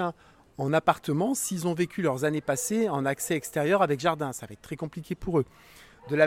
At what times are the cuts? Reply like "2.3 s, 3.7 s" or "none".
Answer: none